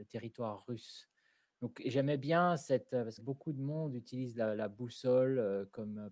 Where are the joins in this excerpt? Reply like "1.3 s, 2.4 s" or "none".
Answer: 3.2 s